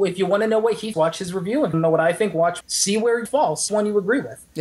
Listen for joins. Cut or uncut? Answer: cut